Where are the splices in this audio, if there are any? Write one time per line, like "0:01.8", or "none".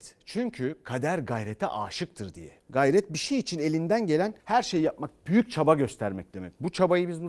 0:02.6
0:04.4

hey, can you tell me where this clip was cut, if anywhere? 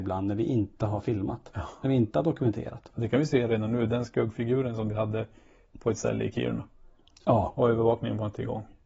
none

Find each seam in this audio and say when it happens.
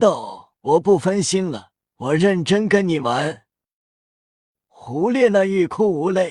0:01.8

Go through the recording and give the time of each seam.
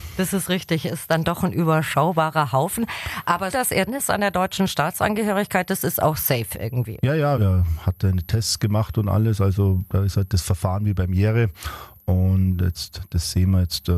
0:03.5
0:03.9
0:07.3

